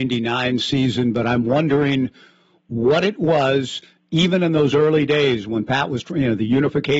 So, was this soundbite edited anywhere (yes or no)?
no